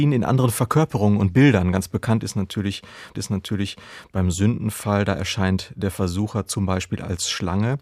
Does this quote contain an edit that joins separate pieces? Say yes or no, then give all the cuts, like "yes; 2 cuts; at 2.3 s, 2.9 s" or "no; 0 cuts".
yes; 1 cut; at 3.1 s